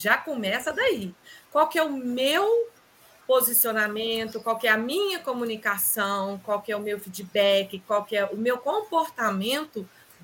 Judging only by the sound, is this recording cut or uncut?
uncut